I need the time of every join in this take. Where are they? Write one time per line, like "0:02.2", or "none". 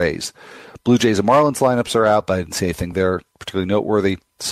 none